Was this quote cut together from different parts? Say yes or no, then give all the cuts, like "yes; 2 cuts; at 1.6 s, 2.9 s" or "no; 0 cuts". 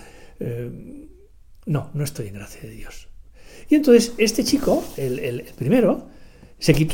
no; 0 cuts